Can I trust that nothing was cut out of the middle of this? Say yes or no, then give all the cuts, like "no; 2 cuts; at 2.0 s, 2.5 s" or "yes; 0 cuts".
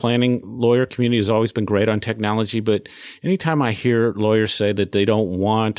yes; 0 cuts